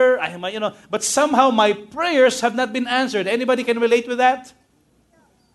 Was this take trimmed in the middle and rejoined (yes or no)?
no